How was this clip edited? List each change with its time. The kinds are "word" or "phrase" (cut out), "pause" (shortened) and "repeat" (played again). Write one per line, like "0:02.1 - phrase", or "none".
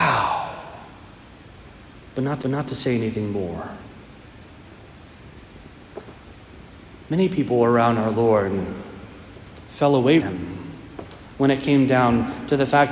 0:02.4 - repeat
0:10.2 - word